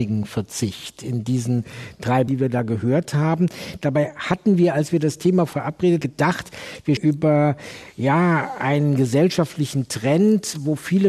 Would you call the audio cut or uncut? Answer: cut